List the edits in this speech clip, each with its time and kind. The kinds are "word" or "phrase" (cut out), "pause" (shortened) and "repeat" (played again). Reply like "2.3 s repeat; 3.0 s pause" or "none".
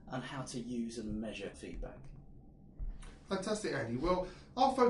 1.5 s word